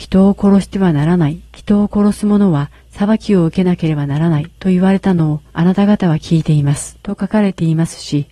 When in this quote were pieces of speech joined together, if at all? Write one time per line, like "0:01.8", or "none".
0:01.4
0:02.8
0:04.5
0:05.5
0:07.0